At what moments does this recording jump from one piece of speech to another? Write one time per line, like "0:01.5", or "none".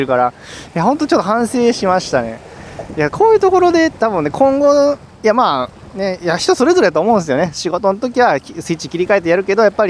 none